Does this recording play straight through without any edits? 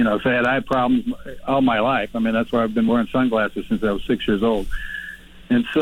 yes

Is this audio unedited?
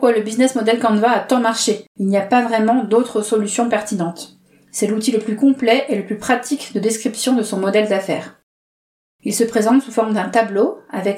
no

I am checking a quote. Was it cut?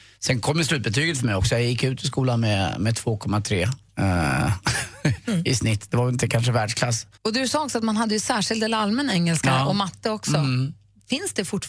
yes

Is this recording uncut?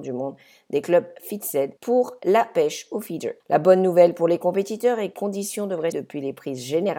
no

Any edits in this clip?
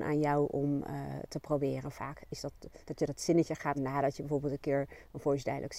yes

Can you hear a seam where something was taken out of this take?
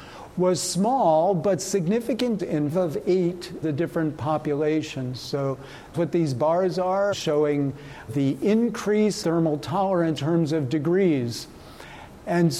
yes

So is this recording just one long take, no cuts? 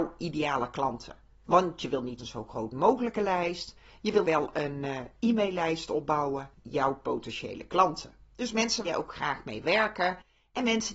no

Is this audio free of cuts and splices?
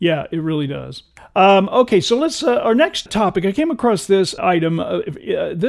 no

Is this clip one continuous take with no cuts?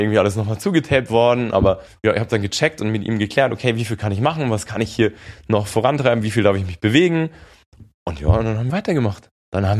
no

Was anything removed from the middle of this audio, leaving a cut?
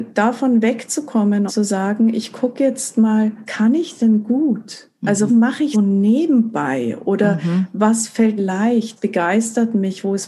yes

